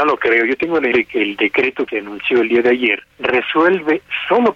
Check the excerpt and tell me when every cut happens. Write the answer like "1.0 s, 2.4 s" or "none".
0.9 s, 1.9 s, 3.1 s